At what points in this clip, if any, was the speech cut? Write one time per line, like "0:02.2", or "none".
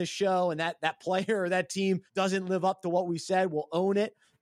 0:02.1